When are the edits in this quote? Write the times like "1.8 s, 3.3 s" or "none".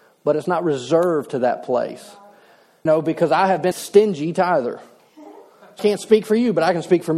2.9 s, 3.7 s, 5.8 s